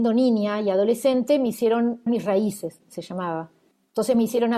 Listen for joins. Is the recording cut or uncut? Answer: cut